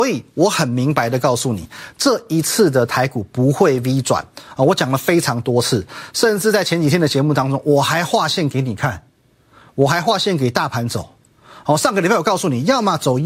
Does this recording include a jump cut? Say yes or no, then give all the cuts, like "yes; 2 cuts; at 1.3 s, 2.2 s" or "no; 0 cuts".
no; 0 cuts